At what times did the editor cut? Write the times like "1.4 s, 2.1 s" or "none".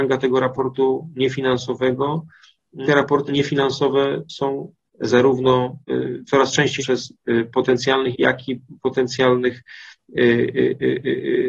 2.8 s, 3.3 s, 4.9 s, 5.8 s, 6.8 s, 8.1 s